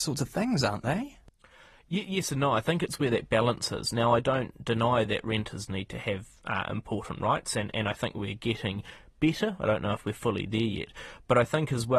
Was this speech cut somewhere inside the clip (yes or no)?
no